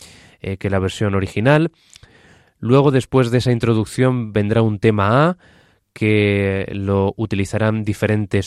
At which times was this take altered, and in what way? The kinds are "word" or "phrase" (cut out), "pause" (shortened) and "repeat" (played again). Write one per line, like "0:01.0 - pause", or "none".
none

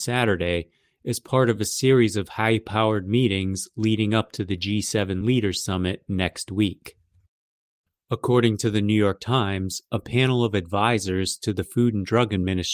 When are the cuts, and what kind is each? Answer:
none

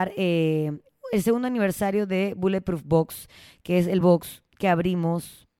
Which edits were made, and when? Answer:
none

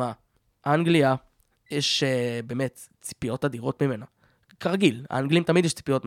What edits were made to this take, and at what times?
none

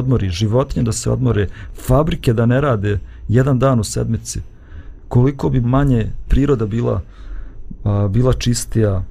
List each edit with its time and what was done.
0:05.6 - word
0:06.3 - phrase

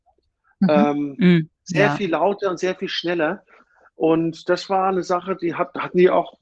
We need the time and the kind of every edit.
none

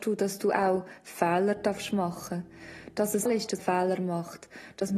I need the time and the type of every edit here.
0:03.3 - word
0:03.6 - word

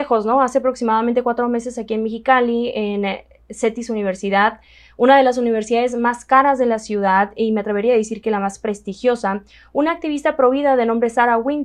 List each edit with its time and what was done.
none

